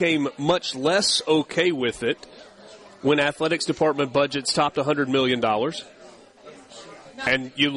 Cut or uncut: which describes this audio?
uncut